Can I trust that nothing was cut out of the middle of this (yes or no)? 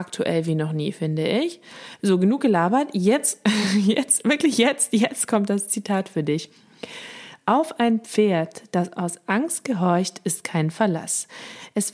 yes